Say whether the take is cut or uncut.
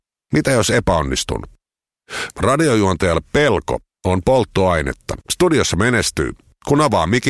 cut